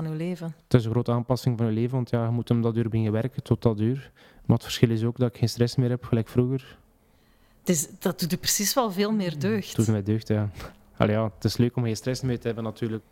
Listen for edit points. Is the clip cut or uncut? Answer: uncut